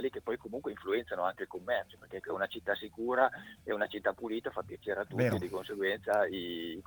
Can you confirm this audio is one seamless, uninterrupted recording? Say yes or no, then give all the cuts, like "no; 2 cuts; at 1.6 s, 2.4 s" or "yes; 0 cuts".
no; 1 cut; at 2.2 s